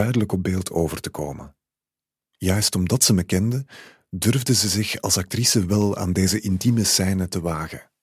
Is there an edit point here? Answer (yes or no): no